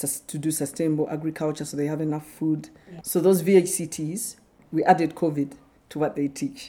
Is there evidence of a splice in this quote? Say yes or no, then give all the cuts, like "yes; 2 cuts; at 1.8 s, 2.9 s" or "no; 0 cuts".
no; 0 cuts